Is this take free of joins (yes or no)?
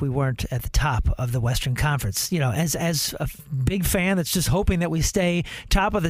yes